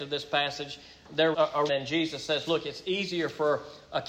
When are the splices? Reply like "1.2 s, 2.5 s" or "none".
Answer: 1.3 s, 1.7 s